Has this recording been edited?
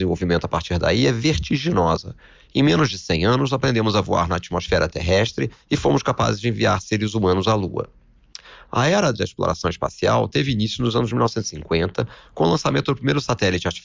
no; 0 cuts

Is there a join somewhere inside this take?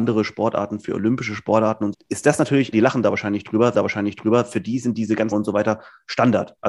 yes; 4 cuts; at 1.9 s, 2.7 s, 3.7 s, 5.3 s

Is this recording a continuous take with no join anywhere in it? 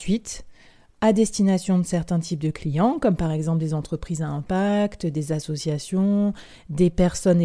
yes; 0 cuts

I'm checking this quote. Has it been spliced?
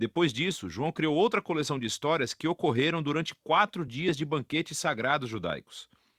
no; 0 cuts

